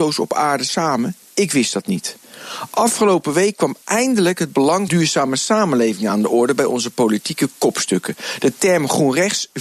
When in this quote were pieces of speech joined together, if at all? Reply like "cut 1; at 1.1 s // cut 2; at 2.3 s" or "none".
cut 1; at 1.2 s // cut 2; at 3.8 s // cut 3; at 4.9 s